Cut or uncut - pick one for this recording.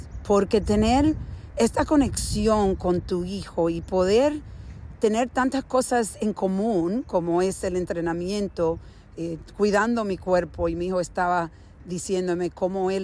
uncut